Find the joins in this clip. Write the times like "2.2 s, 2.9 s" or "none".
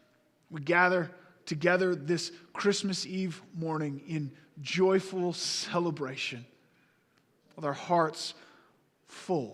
none